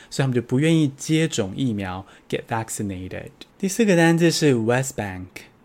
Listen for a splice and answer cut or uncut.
cut